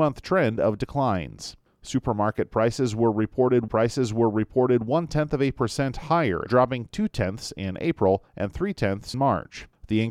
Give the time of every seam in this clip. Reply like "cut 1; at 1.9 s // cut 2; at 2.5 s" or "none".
cut 1; at 3.7 s // cut 2; at 6.5 s // cut 3; at 9.1 s